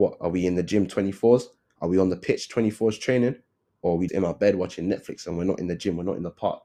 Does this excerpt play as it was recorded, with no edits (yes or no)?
no